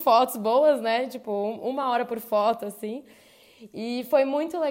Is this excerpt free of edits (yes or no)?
yes